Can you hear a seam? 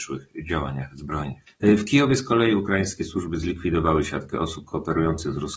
no; 0 cuts

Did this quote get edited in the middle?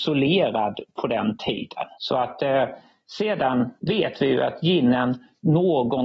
yes; 1 cut; at 3.8 s

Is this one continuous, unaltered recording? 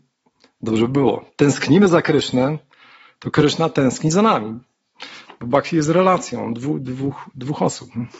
yes; 0 cuts

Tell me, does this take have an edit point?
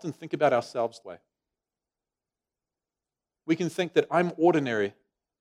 yes; 1 cut; at 1.0 s

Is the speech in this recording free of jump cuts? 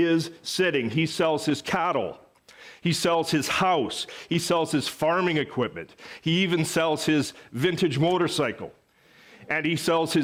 yes; 0 cuts

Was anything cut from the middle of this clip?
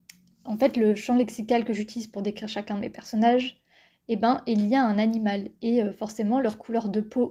no; 0 cuts

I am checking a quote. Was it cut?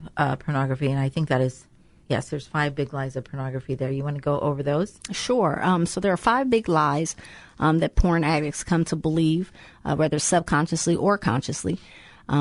no; 0 cuts

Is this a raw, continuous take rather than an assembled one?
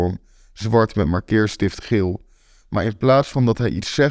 yes; 0 cuts

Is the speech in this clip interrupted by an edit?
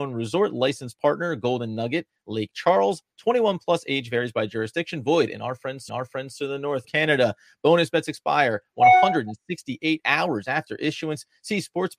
yes; 2 cuts; at 5.9 s, 6.8 s

